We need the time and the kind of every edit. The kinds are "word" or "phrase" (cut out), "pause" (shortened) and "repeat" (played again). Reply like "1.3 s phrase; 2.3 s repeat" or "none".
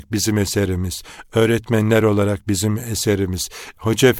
none

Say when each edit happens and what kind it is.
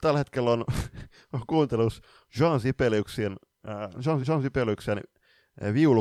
4.2 s repeat

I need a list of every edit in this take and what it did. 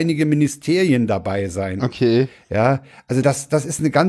none

